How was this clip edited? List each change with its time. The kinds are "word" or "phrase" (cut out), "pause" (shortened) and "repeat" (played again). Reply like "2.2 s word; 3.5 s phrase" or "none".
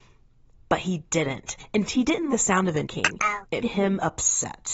1.9 s word; 2.3 s word; 2.8 s word; 3.6 s word